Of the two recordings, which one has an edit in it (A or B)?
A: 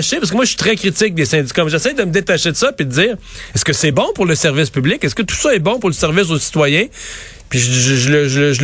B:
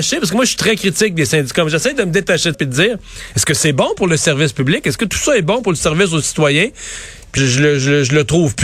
B